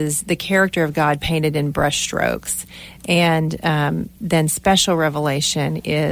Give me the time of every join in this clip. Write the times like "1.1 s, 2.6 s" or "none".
1.7 s, 4.2 s